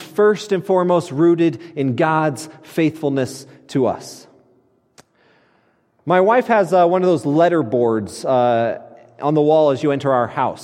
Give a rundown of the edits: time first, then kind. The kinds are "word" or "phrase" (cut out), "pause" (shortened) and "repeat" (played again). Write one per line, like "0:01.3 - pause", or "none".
none